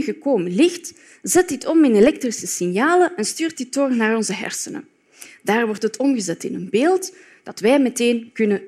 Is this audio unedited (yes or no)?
yes